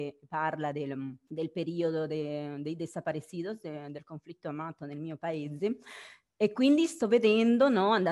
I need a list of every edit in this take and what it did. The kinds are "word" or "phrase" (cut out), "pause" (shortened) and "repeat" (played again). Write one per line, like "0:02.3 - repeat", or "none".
none